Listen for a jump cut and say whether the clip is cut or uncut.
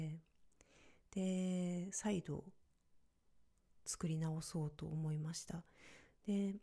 uncut